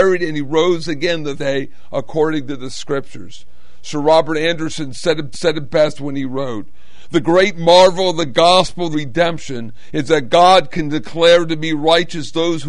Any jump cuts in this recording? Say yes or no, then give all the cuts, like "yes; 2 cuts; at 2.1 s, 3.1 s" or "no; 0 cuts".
yes; 3 cuts; at 1.4 s, 5.3 s, 8.9 s